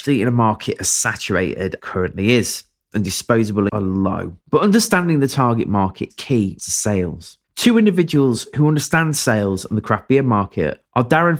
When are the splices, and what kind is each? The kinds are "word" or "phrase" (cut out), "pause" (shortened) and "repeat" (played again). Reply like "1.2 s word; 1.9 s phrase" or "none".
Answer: 1.8 s phrase; 2.9 s phrase; 3.7 s word; 4.4 s pause; 6.1 s word; 6.6 s phrase; 7.4 s pause